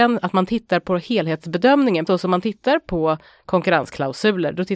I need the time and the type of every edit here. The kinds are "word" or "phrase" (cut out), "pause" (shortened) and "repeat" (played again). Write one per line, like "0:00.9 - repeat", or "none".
0:02.1 - word